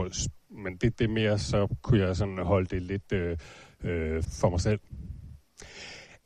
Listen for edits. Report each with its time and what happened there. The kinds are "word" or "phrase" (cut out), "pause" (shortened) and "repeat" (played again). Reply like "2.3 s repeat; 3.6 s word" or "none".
4.2 s word